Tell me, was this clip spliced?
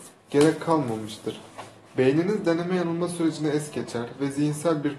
no; 0 cuts

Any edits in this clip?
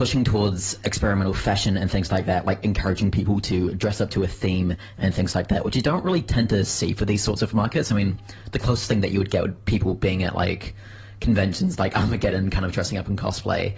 yes; 1 cut; at 2.6 s

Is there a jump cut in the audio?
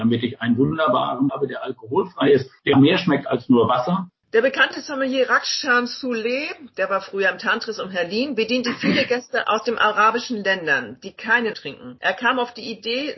yes; 3 cuts; at 1.3 s, 2.7 s, 11.5 s

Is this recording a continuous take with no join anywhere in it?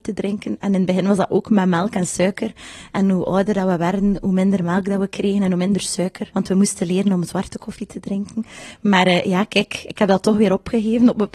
yes; 0 cuts

